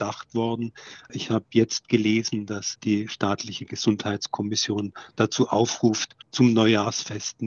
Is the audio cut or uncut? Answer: cut